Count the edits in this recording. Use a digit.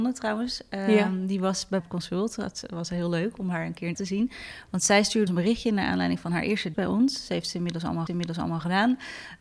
5